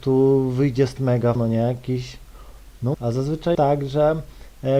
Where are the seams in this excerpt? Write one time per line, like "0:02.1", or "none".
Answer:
0:01.0
0:01.3
0:02.9
0:03.5